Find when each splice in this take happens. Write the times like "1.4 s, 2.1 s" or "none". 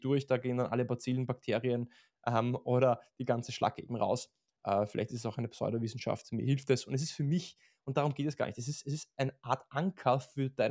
none